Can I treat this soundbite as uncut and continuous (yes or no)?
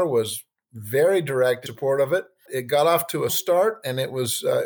no